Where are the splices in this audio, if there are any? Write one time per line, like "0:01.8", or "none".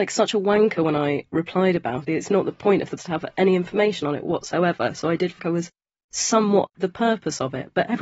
0:02.1
0:03.0
0:05.4
0:06.7